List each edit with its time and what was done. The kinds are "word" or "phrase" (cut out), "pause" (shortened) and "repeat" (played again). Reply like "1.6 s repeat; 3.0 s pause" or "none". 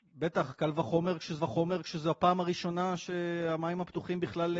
1.4 s repeat